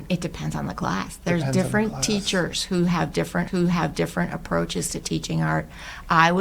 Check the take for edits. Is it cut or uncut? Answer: cut